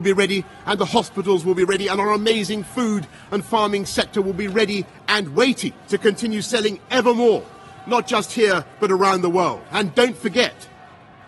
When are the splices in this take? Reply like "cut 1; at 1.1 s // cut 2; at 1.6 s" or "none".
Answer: cut 1; at 5.8 s